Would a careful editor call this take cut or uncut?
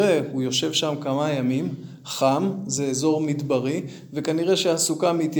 uncut